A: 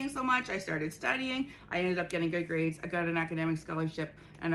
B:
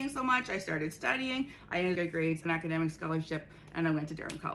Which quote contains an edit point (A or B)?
B